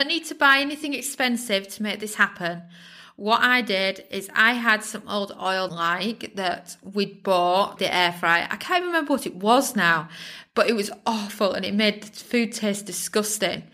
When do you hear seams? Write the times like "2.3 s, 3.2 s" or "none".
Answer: 5.7 s, 7.8 s